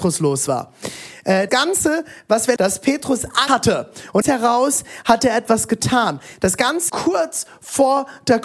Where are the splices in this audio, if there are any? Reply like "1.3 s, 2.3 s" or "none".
1.5 s, 2.6 s, 3.5 s, 4.2 s, 6.9 s